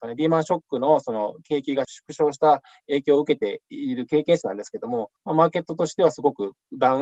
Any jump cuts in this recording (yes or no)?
yes